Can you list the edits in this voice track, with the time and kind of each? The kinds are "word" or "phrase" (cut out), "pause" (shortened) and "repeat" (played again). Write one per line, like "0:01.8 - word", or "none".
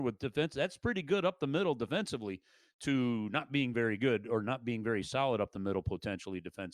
none